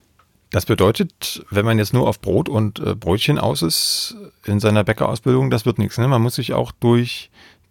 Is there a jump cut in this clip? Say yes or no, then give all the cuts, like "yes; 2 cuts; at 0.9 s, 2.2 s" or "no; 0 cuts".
no; 0 cuts